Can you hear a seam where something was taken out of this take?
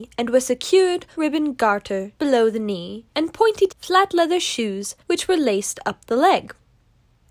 yes; 5 cuts; at 1.1 s, 2.2 s, 3.1 s, 3.7 s, 5.0 s

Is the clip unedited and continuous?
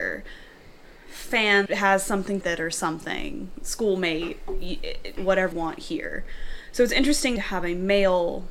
no; 5 cuts; at 1.7 s, 2.4 s, 5.2 s, 5.5 s, 7.4 s

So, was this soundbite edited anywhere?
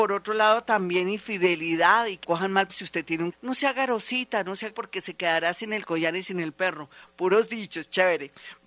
yes; 4 cuts; at 2.2 s, 2.7 s, 3.3 s, 4.7 s

